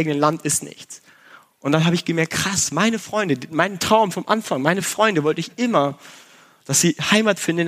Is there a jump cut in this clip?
no; 0 cuts

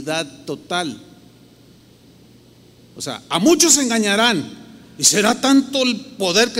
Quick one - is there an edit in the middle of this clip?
no; 0 cuts

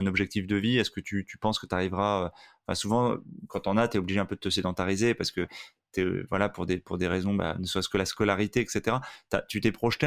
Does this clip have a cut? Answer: no; 0 cuts

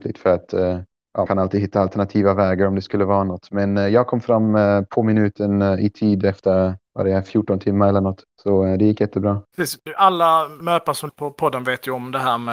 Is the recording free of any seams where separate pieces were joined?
no; 2 cuts; at 1.3 s, 11.1 s

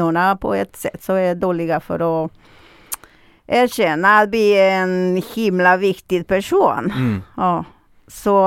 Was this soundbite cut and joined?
no; 0 cuts

